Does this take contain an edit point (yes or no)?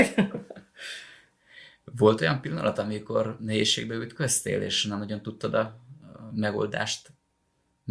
no